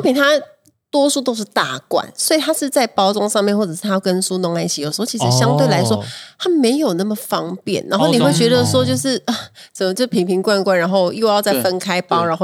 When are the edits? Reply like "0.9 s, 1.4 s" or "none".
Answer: none